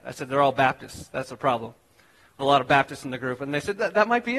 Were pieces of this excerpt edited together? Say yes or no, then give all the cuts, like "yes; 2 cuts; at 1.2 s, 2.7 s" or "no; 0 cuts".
yes; 1 cut; at 2.4 s